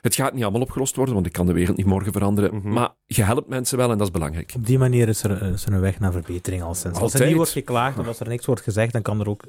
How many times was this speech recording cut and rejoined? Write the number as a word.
one